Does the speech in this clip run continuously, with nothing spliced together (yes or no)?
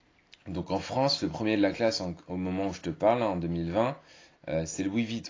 yes